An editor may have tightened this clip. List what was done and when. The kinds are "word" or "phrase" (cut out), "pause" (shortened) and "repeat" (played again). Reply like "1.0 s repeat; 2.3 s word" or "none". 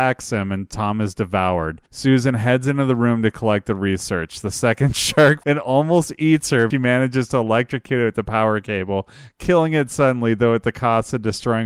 1.9 s pause; 5.4 s word; 6.7 s phrase